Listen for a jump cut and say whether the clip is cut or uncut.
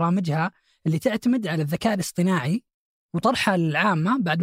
uncut